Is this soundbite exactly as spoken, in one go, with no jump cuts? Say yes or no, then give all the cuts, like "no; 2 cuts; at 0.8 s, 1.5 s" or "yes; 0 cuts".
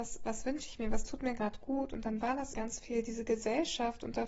no; 1 cut; at 2.5 s